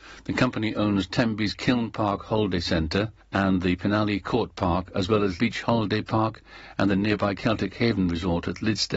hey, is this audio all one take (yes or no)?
no